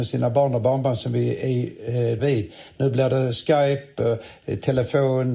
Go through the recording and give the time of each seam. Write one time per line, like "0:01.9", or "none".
0:02.2